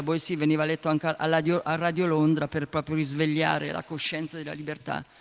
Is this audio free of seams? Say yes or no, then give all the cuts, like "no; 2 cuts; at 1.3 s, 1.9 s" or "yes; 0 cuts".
yes; 0 cuts